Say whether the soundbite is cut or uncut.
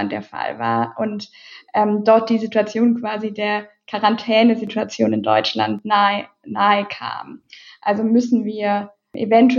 uncut